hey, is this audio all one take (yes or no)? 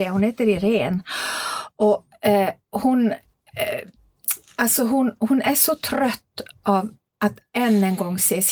yes